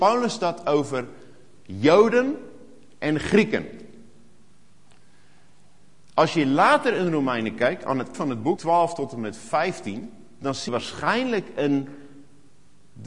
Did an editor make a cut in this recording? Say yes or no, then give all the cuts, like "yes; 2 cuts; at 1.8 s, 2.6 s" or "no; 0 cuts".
yes; 3 cuts; at 8.1 s, 8.6 s, 10.7 s